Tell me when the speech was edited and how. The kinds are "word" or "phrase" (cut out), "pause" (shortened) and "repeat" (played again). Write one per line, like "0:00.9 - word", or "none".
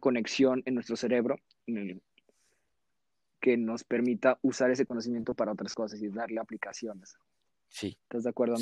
none